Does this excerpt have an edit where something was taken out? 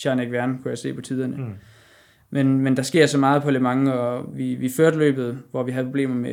no; 0 cuts

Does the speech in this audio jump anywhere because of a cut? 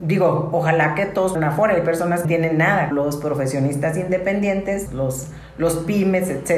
yes; 4 cuts; at 1.3 s, 2.2 s, 2.9 s, 4.9 s

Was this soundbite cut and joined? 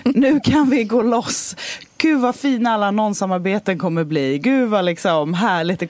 no; 0 cuts

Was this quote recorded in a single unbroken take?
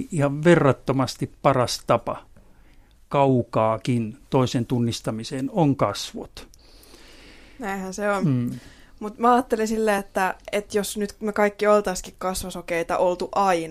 yes; 0 cuts

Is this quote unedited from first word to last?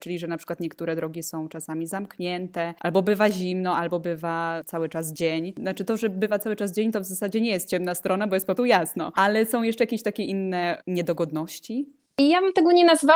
no; 1 cut; at 8.6 s

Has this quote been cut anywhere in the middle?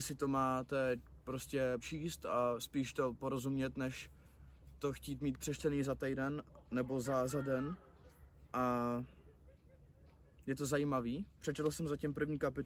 yes; 1 cut; at 1.8 s

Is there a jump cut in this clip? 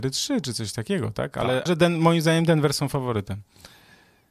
yes; 1 cut; at 1.7 s

